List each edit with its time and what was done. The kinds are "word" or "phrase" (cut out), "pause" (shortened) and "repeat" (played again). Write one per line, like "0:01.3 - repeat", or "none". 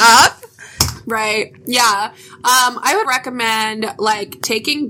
0:03.0 - word